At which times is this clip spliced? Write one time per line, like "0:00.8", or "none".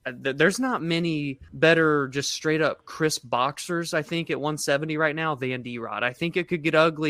0:01.5